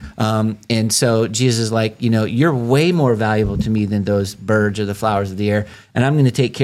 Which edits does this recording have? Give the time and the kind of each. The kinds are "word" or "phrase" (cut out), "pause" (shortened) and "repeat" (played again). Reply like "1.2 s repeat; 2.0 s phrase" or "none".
none